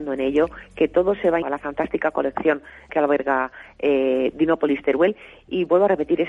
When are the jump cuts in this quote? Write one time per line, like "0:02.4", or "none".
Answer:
0:01.4
0:02.9